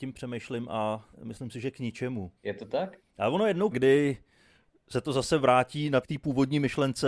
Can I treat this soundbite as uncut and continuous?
no; 4 cuts; at 1.1 s, 2.4 s, 3.7 s, 6.0 s

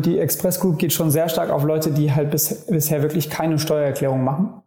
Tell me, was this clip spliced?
no; 0 cuts

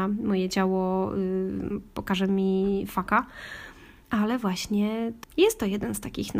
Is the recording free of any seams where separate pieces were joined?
yes; 0 cuts

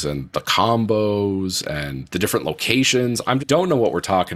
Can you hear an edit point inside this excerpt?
yes; 1 cut; at 3.4 s

